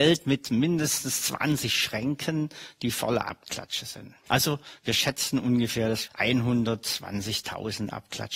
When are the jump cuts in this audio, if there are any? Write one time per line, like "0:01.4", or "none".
0:04.2
0:06.1